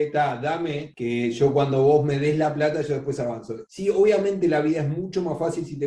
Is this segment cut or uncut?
uncut